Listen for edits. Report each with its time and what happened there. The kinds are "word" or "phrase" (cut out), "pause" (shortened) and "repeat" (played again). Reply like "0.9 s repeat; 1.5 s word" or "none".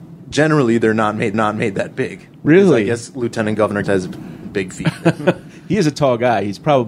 1.3 s repeat; 3.8 s word

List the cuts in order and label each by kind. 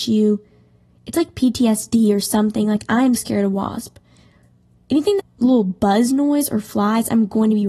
3.2 s word; 5.2 s phrase

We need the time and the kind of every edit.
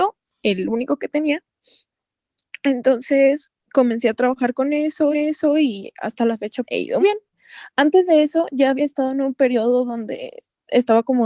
3.6 s pause; 5.1 s repeat; 6.6 s word; 7.0 s word

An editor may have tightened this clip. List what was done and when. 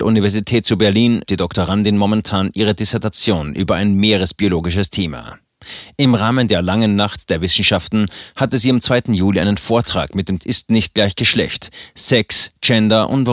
1.3 s word; 10.4 s phrase

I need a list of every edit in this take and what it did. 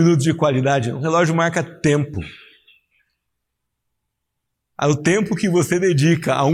none

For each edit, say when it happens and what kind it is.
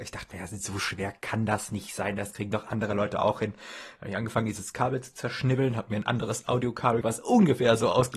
7.0 s word

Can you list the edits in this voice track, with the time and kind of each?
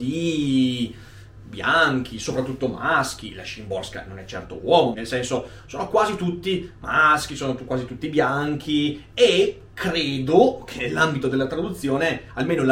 4.9 s phrase

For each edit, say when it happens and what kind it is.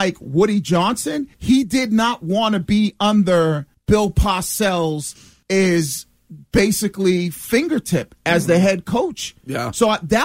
1.3 s pause; 3.7 s pause; 5.4 s pause

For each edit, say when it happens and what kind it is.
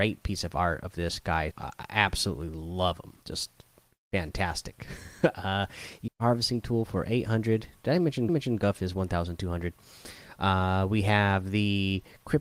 1.5 s word; 3.2 s pause; 6.1 s phrase; 8.3 s repeat

